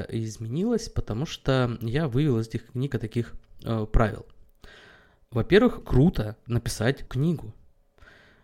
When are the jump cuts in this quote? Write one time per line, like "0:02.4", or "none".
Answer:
0:02.9
0:05.8
0:07.1

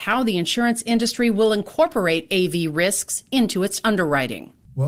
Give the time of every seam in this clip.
none

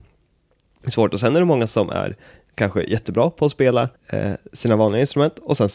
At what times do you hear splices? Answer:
0:04.0

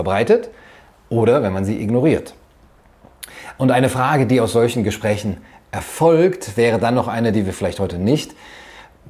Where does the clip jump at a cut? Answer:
none

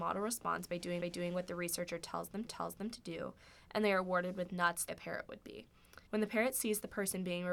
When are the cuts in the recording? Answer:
0:01.0
0:02.5
0:04.9
0:06.1

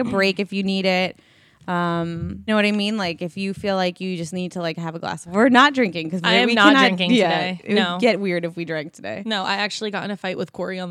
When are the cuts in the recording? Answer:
0:02.5
0:05.3

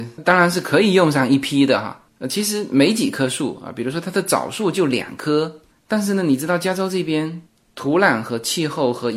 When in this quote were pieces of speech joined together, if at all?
none

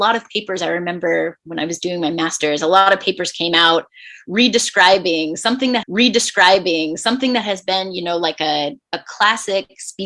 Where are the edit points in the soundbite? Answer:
0:05.8

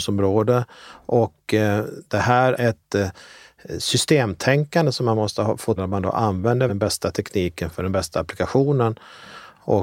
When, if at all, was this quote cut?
0:02.6
0:05.8
0:06.7

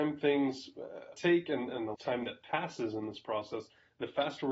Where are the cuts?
0:01.1
0:01.9

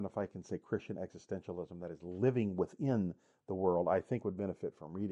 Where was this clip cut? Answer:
none

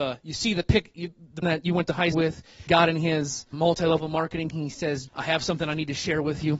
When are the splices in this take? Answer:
0:01.4
0:02.1
0:02.7
0:03.5
0:04.5
0:05.1

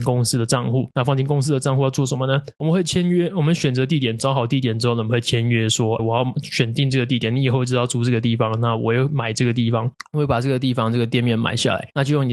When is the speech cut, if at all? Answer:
0:06.0

